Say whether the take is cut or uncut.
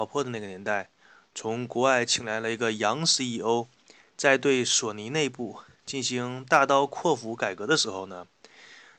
uncut